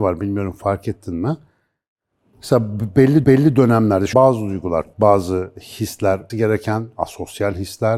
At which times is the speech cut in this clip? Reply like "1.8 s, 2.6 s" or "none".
3.2 s, 4.1 s, 4.9 s, 6.3 s